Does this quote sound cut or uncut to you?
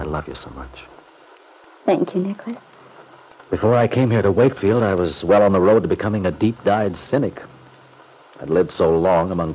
uncut